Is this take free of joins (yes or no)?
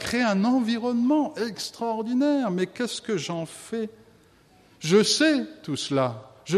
yes